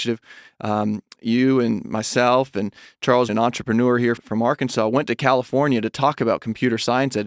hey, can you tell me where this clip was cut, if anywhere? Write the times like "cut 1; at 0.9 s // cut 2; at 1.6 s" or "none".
cut 1; at 3.3 s // cut 2; at 4.2 s